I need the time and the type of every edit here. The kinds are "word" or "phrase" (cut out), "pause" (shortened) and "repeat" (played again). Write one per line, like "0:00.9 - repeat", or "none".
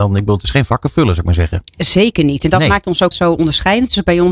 0:03.1 - word